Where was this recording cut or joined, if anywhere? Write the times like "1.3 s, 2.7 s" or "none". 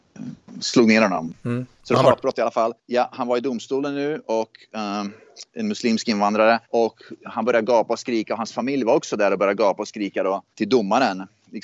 1.7 s, 2.8 s, 5.5 s, 6.6 s, 10.5 s